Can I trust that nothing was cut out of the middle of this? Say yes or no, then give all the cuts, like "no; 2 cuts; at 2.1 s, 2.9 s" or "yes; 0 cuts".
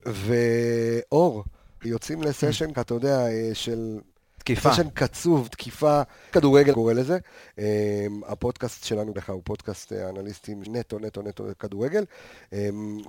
no; 7 cuts; at 1.8 s, 2.7 s, 5.5 s, 6.3 s, 6.7 s, 9.2 s, 10.7 s